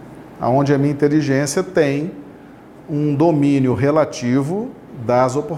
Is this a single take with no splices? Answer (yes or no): yes